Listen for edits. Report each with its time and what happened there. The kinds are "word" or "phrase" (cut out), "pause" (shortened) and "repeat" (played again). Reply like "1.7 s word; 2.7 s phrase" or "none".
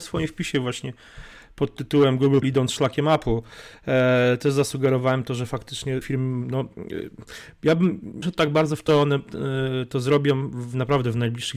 2.4 s word; 6.0 s word; 8.2 s word; 8.9 s word